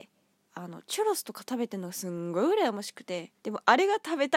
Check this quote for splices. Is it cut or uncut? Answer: cut